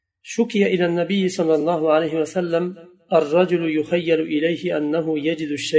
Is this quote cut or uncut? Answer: uncut